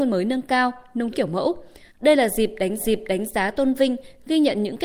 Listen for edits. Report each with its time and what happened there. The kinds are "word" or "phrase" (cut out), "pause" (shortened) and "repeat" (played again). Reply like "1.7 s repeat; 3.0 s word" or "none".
1.1 s phrase; 1.9 s pause; 2.8 s repeat